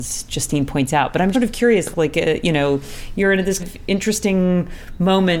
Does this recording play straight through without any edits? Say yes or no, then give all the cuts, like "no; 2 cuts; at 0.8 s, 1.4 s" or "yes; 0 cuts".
no; 3 cuts; at 1.3 s, 1.9 s, 3.6 s